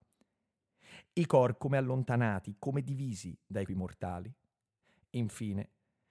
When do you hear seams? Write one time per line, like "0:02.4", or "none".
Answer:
0:01.6
0:03.7